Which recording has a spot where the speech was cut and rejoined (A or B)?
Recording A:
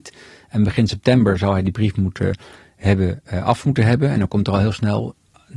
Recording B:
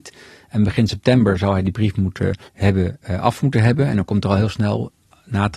B